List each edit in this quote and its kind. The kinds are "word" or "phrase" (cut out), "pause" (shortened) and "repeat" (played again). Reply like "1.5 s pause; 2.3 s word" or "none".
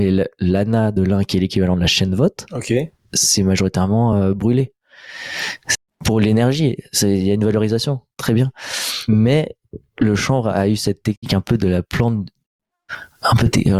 none

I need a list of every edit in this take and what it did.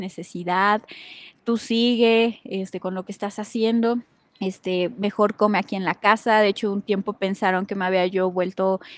4.3 s pause

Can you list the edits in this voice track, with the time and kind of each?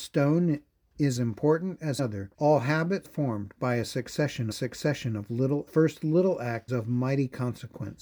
1.2 s word; 2.0 s word; 2.3 s pause; 3.0 s word; 4.5 s repeat; 5.7 s phrase; 6.7 s word

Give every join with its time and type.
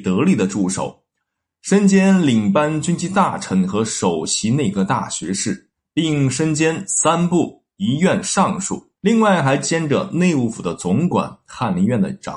5.7 s pause; 9.0 s pause

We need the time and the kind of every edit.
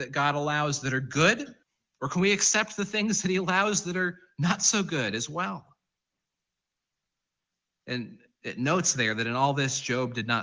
1.6 s pause

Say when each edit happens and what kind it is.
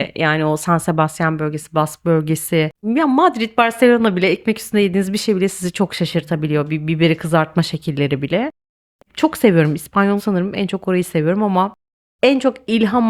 10.2 s word

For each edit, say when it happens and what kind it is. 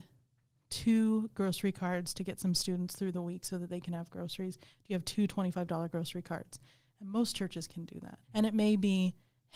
8.2 s pause

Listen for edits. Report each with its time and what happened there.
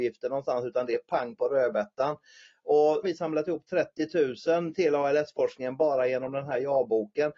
3.0 s phrase

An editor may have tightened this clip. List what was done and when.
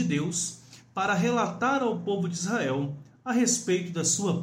none

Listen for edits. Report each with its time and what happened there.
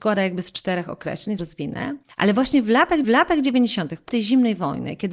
1.4 s phrase; 2.1 s pause; 3.0 s repeat; 4.1 s word

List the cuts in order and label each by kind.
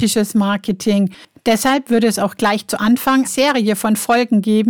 3.2 s word

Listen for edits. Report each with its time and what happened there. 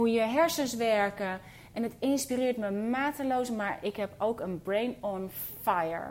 none

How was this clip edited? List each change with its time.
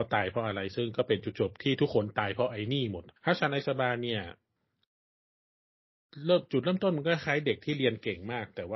3.2 s pause

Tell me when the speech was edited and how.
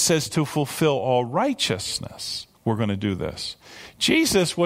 2.5 s pause

